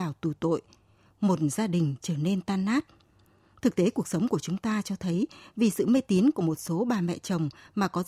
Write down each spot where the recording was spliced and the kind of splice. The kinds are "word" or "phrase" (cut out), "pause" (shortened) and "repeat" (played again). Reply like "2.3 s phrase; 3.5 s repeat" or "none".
none